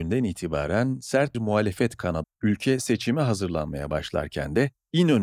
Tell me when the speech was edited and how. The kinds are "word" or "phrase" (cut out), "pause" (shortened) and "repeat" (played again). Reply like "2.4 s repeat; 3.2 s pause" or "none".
1.3 s word; 2.2 s word

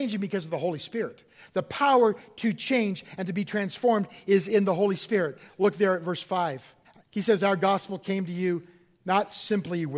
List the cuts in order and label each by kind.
6.8 s pause

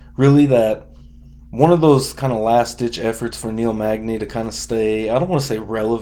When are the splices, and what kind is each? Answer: none

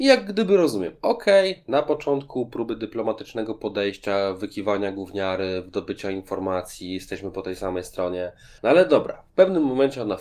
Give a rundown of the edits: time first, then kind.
8.6 s pause

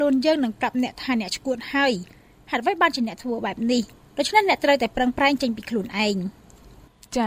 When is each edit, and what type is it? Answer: none

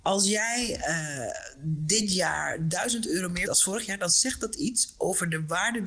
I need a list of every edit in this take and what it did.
3.5 s word

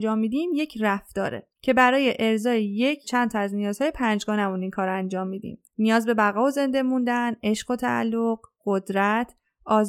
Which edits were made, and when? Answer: 1.5 s pause; 3.0 s word

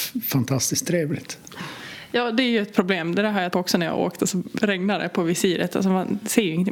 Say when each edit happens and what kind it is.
3.5 s word

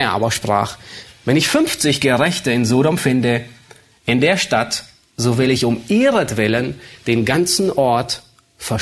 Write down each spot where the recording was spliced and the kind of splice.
none

